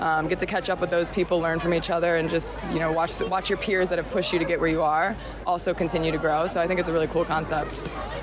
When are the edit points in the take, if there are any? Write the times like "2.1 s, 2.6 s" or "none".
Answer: none